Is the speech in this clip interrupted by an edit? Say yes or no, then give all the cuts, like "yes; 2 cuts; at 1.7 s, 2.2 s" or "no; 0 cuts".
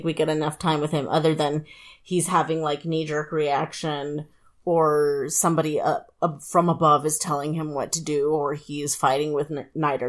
no; 0 cuts